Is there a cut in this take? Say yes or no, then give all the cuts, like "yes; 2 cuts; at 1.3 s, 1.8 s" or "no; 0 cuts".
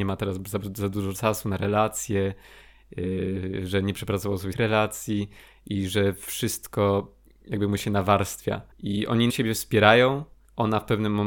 yes; 3 cuts; at 4.5 s, 8.7 s, 9.3 s